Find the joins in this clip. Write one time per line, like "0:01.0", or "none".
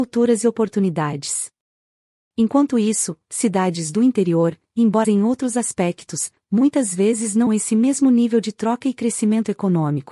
0:05.0
0:07.5